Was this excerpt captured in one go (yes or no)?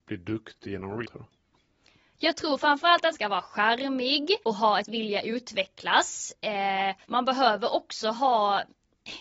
no